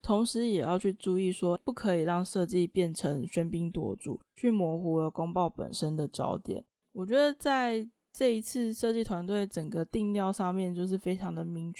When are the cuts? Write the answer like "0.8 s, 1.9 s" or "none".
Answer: 1.6 s